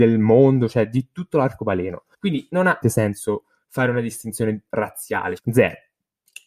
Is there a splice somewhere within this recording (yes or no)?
yes